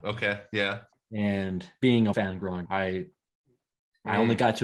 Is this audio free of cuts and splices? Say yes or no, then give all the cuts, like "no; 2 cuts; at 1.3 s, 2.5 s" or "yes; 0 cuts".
no; 2 cuts; at 2.1 s, 2.7 s